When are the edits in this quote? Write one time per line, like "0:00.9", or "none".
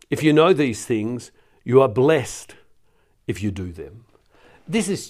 none